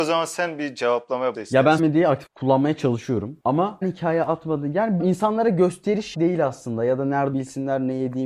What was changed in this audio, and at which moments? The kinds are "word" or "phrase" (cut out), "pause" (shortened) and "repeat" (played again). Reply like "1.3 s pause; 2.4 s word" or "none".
1.3 s word; 1.8 s word; 2.3 s phrase; 3.8 s word; 5.0 s word; 6.1 s word; 7.3 s word